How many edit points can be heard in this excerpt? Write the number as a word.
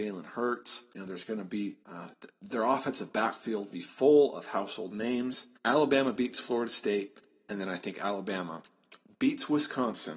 four